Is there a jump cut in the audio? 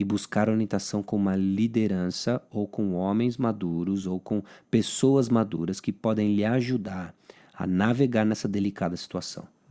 no; 0 cuts

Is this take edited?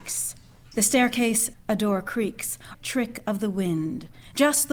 yes; 2 cuts; at 1.5 s, 2.7 s

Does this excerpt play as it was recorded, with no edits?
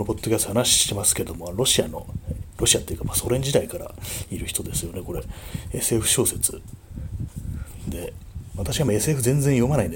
yes; 0 cuts

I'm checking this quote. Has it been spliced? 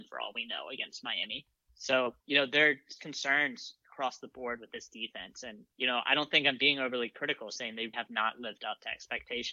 yes; 4 cuts; at 2.2 s, 3.0 s, 5.7 s, 7.9 s

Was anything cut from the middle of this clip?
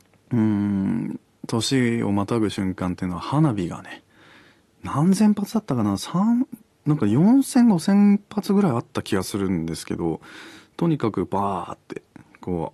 no; 0 cuts

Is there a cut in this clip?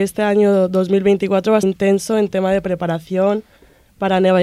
yes; 1 cut; at 1.6 s

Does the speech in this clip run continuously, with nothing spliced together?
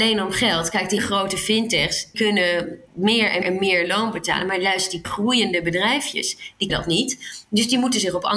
no; 6 cuts; at 1.0 s, 2.1 s, 2.9 s, 3.4 s, 5.0 s, 6.7 s

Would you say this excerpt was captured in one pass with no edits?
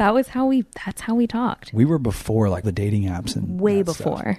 no; 1 cut; at 2.6 s

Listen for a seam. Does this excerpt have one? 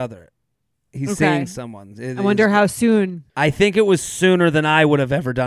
yes; 1 cut; at 3.3 s

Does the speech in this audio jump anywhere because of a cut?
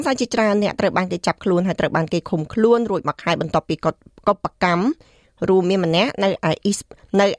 no; 0 cuts

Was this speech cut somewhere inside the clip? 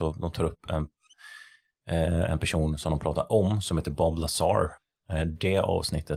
no; 0 cuts

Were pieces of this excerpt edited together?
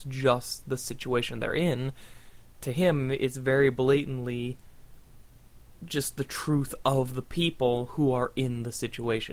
no; 0 cuts

